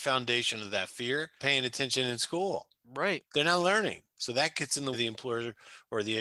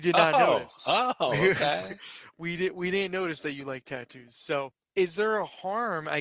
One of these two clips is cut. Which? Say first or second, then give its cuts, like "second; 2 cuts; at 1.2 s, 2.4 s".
first; 4 cuts; at 1.4 s, 2.7 s, 4.1 s, 4.9 s